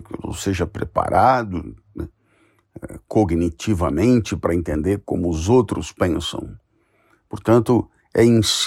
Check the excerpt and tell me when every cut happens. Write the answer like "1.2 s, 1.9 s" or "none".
none